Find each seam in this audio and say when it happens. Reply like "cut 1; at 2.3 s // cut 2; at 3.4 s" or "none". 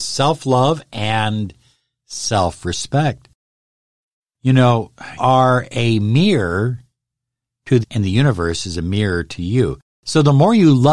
cut 1; at 5.2 s // cut 2; at 7.8 s